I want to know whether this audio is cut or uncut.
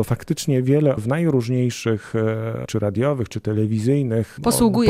cut